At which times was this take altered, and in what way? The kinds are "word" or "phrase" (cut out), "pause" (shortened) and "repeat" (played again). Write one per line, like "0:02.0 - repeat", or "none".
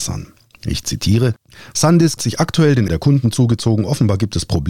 0:02.2 - word
0:02.9 - word